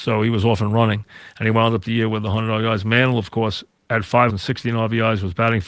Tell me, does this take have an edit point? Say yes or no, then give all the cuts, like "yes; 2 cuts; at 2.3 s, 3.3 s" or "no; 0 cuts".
yes; 1 cut; at 4.3 s